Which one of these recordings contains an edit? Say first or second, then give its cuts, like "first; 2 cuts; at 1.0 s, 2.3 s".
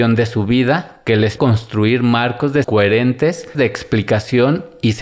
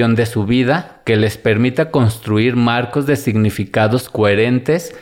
first; 3 cuts; at 1.4 s, 2.6 s, 3.5 s